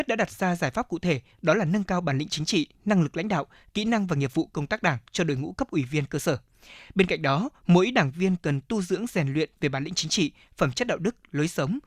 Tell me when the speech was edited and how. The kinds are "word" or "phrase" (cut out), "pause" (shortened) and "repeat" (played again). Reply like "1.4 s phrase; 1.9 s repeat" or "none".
none

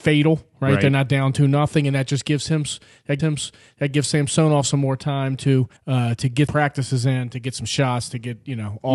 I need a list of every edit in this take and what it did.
3.2 s repeat; 5.8 s pause; 6.5 s word

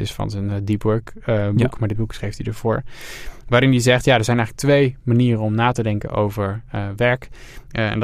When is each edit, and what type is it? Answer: none

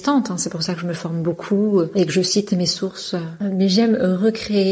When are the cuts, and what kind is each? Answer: none

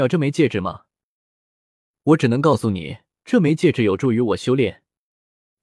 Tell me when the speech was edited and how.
3.1 s pause

